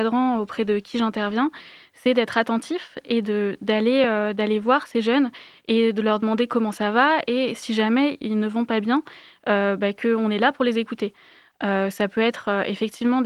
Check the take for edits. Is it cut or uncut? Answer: uncut